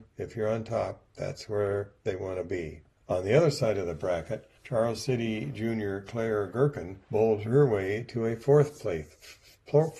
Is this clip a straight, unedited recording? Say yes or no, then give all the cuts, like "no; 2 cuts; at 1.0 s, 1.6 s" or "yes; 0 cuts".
no; 3 cuts; at 3.0 s, 4.6 s, 7.0 s